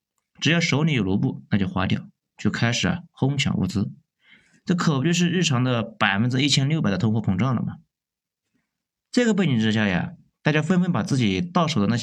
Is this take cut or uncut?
uncut